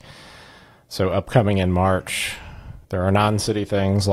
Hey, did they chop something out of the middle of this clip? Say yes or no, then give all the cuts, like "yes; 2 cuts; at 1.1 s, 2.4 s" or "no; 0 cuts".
yes; 1 cut; at 2.8 s